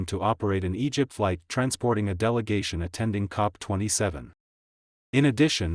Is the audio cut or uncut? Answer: cut